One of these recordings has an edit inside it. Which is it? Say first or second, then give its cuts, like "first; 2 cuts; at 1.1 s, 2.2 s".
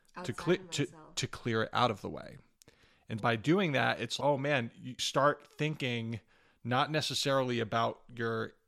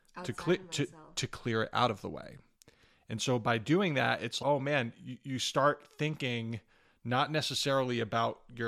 first; 2 cuts; at 3.2 s, 5.0 s